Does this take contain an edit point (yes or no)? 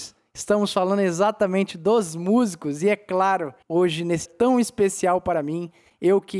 yes